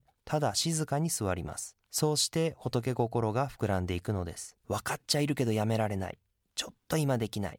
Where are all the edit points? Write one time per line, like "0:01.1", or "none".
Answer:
0:01.8
0:04.6